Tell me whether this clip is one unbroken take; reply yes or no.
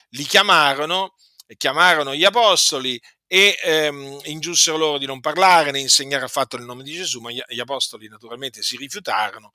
yes